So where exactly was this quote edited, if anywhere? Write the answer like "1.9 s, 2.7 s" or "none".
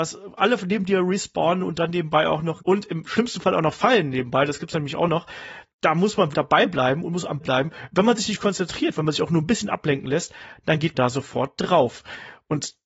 2.6 s, 5.7 s, 6.3 s, 7.4 s, 10.9 s